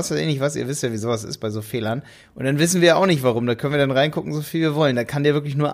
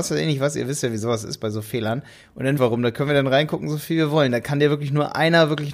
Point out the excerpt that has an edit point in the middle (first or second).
second